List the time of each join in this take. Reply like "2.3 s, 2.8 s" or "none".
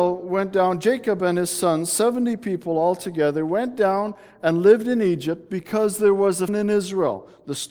6.5 s